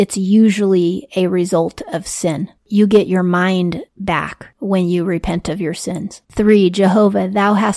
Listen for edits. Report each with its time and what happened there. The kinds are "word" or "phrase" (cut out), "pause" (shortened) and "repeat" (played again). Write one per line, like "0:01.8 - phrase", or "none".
0:02.6 - pause
0:06.2 - pause

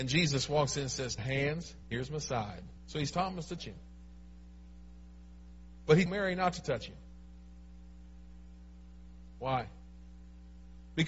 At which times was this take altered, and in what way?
0:01.2 - phrase
0:01.8 - pause
0:02.8 - pause
0:03.1 - word
0:03.6 - word
0:06.1 - word

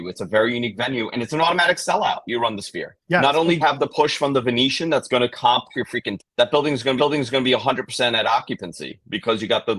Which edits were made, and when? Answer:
0:03.0 - pause
0:03.6 - word
0:05.7 - word
0:06.2 - word
0:07.0 - repeat

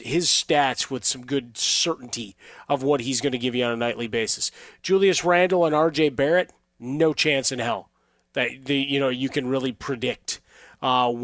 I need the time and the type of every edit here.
none

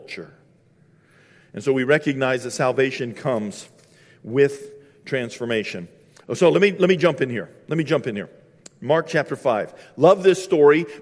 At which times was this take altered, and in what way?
none

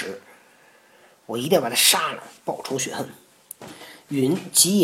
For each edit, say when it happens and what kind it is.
0:02.4 - pause

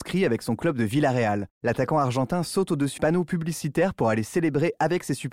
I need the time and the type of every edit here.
0:01.5 - pause
0:03.0 - word

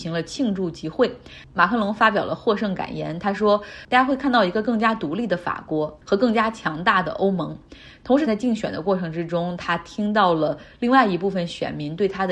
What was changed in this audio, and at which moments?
0:08.3 - phrase

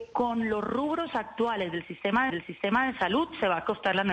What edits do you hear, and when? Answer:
0:02.3 - repeat

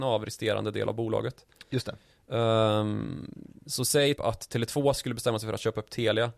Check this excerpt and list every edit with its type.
0:04.2 - word

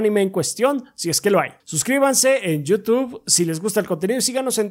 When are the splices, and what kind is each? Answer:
0:01.6 - pause

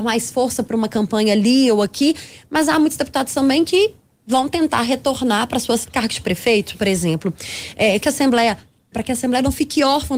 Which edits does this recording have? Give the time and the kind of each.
0:05.8 - word
0:06.7 - word
0:08.0 - word
0:08.9 - word

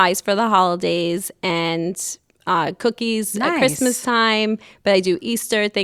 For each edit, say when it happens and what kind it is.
none

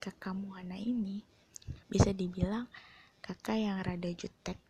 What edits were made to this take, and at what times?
0:01.8 - pause

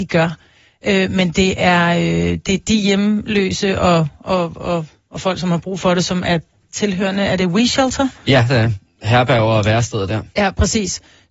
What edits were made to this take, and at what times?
none

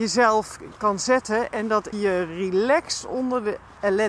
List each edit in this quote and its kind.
0:01.9 - phrase

